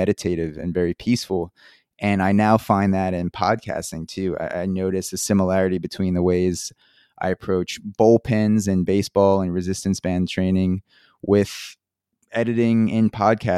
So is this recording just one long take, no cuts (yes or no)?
yes